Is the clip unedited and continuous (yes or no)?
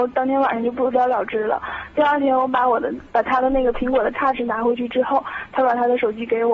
yes